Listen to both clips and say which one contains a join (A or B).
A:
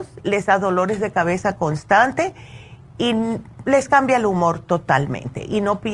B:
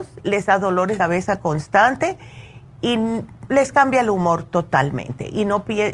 B